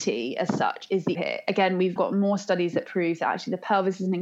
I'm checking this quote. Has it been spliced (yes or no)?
yes